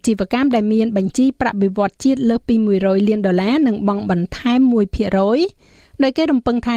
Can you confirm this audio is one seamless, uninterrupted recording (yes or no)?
yes